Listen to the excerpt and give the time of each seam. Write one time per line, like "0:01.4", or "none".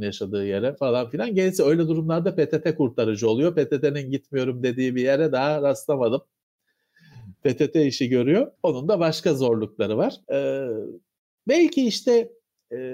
0:08.6
0:10.2